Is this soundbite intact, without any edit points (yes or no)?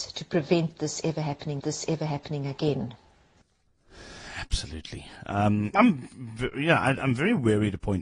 no